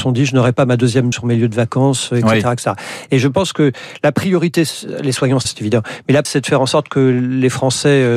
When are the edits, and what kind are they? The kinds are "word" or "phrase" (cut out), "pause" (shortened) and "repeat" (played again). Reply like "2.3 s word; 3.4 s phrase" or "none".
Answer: 1.1 s word; 5.5 s word; 6.3 s word